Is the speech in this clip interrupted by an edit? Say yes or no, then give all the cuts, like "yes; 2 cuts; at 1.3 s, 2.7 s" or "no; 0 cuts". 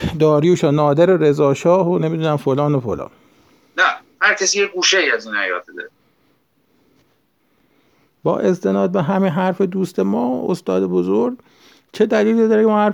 no; 0 cuts